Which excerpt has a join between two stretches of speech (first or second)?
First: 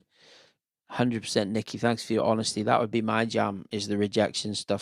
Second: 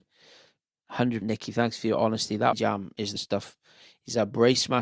second